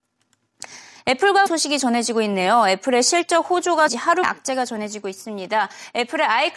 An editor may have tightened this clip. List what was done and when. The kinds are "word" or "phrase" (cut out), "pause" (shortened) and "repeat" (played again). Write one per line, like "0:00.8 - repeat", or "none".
0:01.5 - word
0:03.9 - word
0:04.2 - word